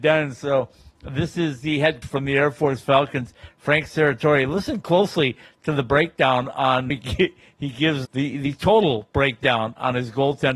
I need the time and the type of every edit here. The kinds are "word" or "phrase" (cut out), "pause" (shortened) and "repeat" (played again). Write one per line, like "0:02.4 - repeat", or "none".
0:02.0 - word
0:06.9 - phrase
0:08.0 - word